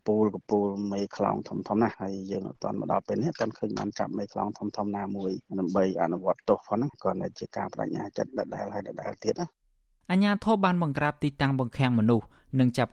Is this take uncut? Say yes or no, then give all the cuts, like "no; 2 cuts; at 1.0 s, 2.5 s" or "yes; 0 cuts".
yes; 0 cuts